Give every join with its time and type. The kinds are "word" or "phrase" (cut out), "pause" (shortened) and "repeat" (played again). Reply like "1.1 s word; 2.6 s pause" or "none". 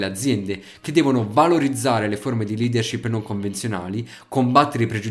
none